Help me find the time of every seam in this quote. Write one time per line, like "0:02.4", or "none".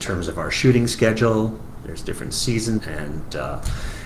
0:02.8